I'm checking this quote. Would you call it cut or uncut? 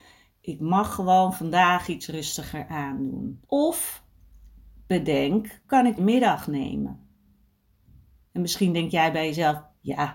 cut